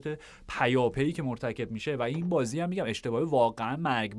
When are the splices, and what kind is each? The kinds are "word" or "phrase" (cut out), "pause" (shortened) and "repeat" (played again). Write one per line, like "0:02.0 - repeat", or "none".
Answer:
none

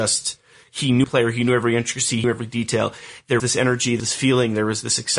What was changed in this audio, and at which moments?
0:01.0 - word
0:02.2 - word
0:03.4 - word
0:04.0 - word

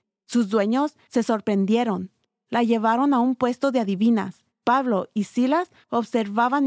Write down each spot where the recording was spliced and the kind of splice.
none

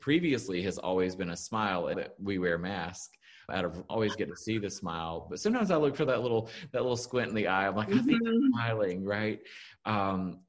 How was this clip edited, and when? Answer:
0:01.9 - word
0:03.5 - word
0:03.9 - phrase

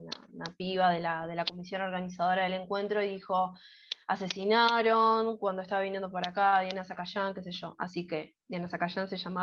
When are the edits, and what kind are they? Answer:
none

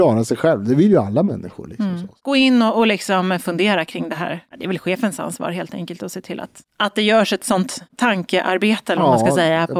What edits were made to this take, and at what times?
none

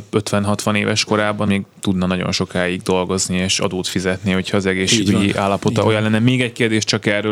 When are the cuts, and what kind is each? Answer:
0:01.4 - word

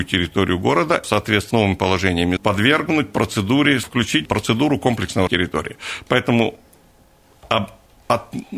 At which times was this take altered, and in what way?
0:01.0 - word
0:01.5 - word
0:02.4 - word
0:03.8 - word
0:04.3 - word
0:05.3 - word

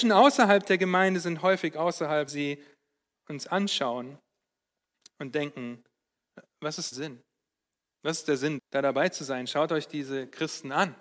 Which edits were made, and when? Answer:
0:02.3 - word
0:06.9 - word
0:08.6 - word

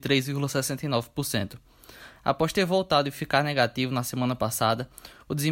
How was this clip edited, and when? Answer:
none

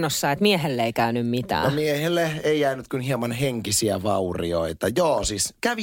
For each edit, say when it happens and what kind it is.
none

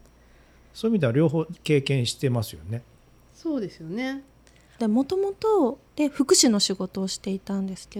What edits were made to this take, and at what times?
0:01.6 - pause
0:05.9 - pause

